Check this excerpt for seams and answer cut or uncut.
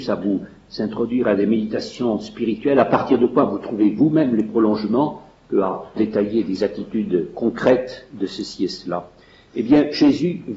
cut